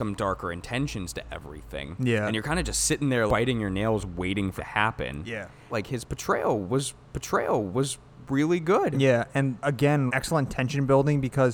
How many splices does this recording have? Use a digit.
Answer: 6